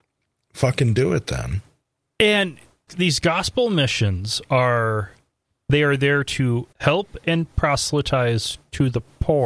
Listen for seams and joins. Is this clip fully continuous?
no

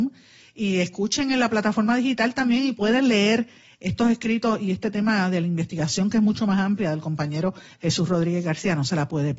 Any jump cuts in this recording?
no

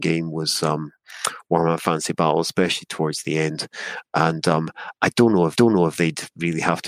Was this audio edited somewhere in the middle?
yes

